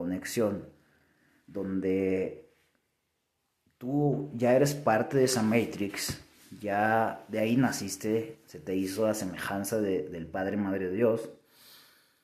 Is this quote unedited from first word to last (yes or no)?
yes